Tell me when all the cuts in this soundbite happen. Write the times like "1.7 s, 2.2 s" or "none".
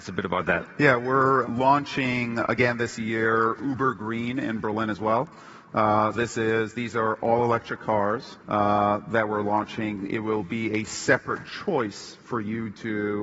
1.4 s, 6.1 s, 8.4 s